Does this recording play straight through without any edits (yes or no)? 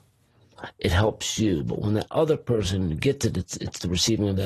yes